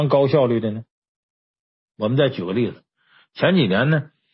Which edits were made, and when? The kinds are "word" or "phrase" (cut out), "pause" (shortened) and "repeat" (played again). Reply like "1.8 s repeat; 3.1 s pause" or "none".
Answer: none